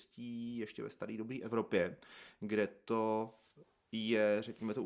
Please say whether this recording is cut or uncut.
uncut